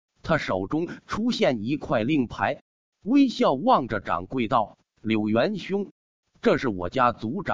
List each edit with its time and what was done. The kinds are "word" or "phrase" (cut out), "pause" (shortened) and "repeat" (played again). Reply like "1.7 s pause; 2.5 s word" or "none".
none